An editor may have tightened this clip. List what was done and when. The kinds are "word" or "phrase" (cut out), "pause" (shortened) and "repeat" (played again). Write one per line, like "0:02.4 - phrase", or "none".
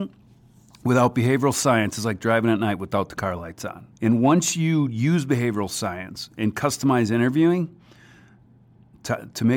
0:03.9 - pause